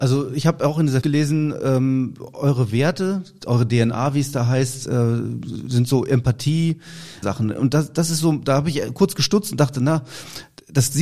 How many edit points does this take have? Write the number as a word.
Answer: two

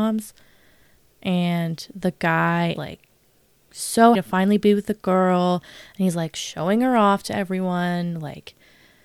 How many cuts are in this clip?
two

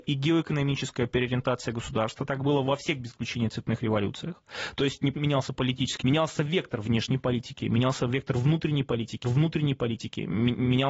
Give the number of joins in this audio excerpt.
three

